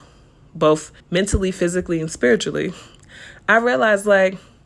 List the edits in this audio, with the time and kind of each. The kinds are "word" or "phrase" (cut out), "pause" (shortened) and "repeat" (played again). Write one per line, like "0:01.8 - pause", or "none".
0:01.0 - pause

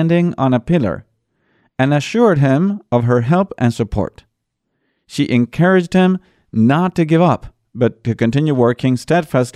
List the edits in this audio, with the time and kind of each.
none

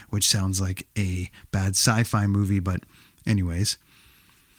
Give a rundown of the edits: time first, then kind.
none

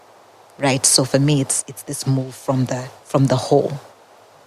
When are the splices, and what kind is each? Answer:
0:03.0 - pause

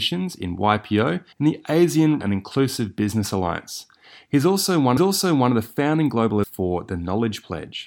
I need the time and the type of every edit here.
0:01.3 - pause
0:02.2 - word
0:05.0 - repeat
0:06.4 - word

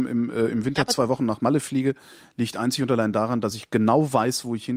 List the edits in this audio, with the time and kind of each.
none

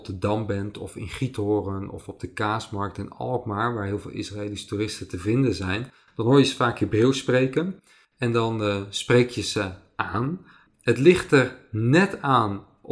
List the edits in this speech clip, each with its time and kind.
none

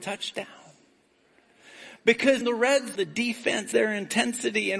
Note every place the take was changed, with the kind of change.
0:02.4 - word
0:02.9 - word
0:03.7 - word

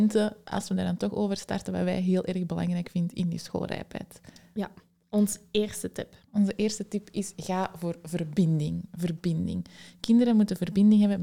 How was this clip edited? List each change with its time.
none

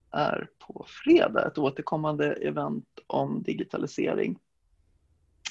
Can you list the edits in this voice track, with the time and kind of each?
none

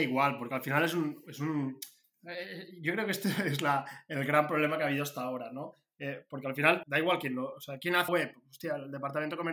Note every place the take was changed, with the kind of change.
0:06.8 - word
0:08.1 - word

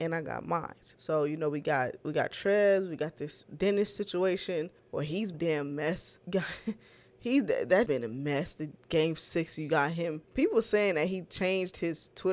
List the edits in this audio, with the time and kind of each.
0:00.9 - pause
0:04.8 - pause
0:05.3 - phrase
0:06.2 - pause
0:07.9 - word
0:10.2 - pause

